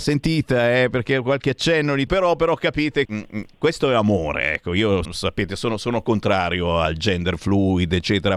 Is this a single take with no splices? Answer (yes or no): no